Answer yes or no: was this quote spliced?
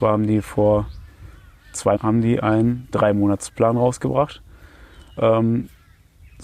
yes